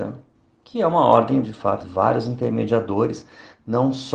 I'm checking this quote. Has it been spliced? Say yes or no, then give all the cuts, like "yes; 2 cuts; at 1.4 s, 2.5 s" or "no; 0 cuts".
yes; 2 cuts; at 1.4 s, 1.8 s